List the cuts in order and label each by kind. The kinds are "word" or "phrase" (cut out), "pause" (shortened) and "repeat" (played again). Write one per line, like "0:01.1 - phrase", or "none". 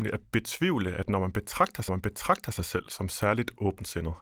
0:01.9 - repeat